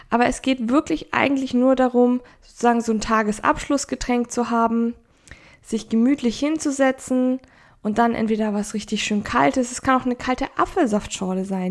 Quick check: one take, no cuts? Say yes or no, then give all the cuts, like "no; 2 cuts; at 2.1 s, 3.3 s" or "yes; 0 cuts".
yes; 0 cuts